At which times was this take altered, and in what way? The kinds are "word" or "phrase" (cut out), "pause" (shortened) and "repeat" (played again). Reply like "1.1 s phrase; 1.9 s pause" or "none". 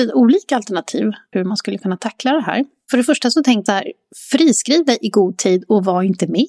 1.3 s word; 3.7 s word